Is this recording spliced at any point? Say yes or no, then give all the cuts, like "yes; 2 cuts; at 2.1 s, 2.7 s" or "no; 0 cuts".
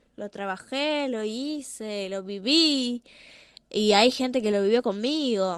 no; 0 cuts